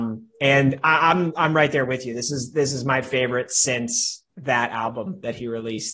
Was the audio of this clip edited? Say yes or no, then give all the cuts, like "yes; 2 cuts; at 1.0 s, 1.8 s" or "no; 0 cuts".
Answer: yes; 1 cut; at 4.3 s